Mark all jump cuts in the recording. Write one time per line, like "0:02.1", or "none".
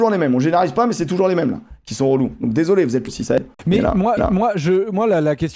0:03.1
0:03.5
0:04.2